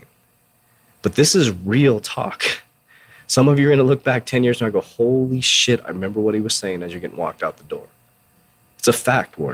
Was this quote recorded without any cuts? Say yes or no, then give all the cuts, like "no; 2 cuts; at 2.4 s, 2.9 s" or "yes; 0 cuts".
yes; 0 cuts